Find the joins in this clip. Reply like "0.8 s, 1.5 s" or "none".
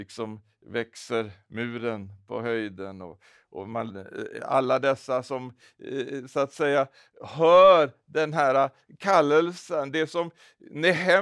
none